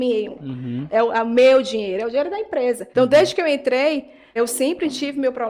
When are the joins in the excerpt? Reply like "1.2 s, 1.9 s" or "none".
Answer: 2.9 s, 4.4 s

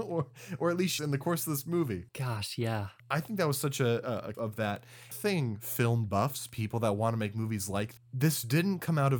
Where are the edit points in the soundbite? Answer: 1.0 s, 2.1 s, 3.0 s, 4.3 s, 5.1 s, 8.0 s

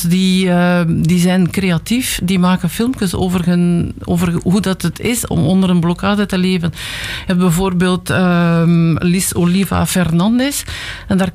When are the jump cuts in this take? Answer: none

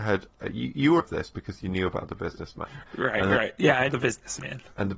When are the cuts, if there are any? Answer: 1.0 s, 3.9 s

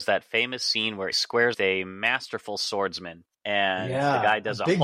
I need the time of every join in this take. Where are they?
1.1 s, 1.5 s, 3.3 s

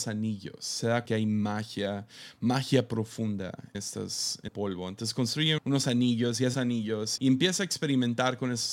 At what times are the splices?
1.1 s, 3.7 s, 4.5 s, 5.6 s, 6.5 s, 7.2 s

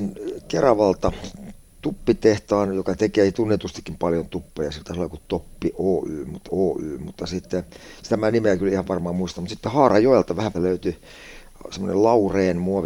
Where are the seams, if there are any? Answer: 6.5 s, 10.5 s

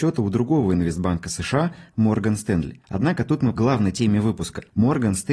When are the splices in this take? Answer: 3.6 s

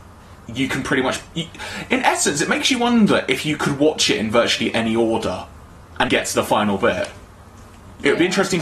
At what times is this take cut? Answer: 6.1 s

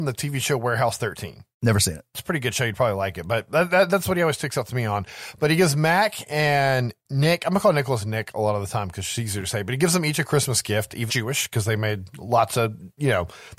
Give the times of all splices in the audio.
1.5 s, 11.1 s

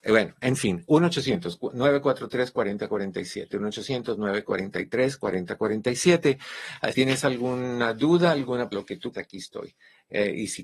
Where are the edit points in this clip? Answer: 6.9 s, 8.7 s, 9.1 s

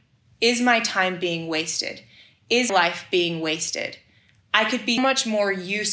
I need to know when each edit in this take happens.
2.7 s, 5.0 s

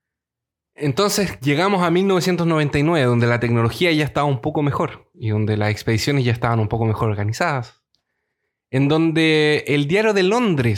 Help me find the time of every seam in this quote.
none

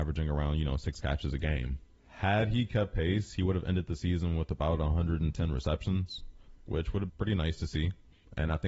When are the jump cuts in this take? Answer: 7.1 s

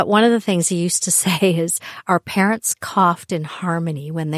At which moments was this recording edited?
none

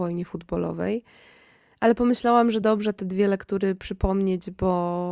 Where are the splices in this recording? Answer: none

